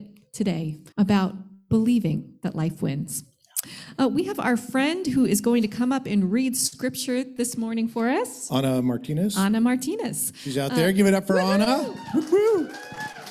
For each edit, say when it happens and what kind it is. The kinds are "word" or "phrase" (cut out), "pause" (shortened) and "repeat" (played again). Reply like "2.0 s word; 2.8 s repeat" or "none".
0.9 s pause